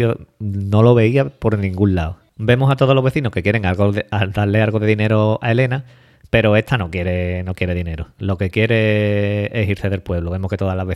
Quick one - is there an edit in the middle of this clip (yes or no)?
no